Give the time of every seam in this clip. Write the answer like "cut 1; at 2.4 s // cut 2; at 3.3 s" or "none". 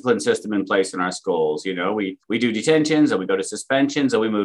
cut 1; at 2.2 s